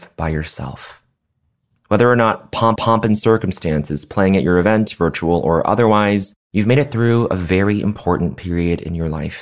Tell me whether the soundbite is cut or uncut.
cut